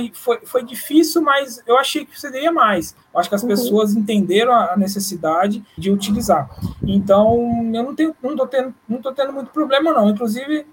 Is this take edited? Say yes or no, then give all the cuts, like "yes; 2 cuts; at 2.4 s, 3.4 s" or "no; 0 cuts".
yes; 2 cuts; at 3.0 s, 5.8 s